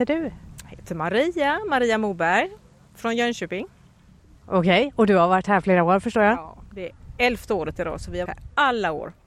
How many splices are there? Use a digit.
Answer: 1